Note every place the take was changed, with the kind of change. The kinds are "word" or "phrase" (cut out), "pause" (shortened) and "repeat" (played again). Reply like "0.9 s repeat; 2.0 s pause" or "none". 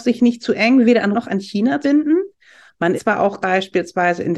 1.1 s word; 1.8 s word; 2.9 s word; 3.4 s word